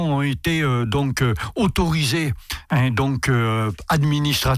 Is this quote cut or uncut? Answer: uncut